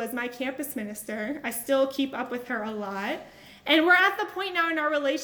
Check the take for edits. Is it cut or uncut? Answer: uncut